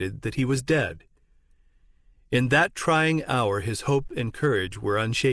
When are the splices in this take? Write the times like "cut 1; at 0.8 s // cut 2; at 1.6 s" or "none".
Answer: none